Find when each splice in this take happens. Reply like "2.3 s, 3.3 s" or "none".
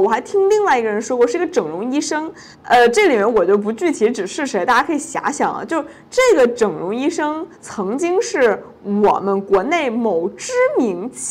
2.5 s, 7.5 s